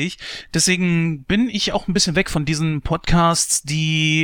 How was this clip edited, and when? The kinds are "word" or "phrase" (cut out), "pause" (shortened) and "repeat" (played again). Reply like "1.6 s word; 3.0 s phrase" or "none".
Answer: none

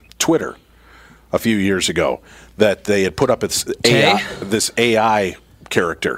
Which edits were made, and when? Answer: none

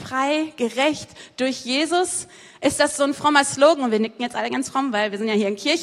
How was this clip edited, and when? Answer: none

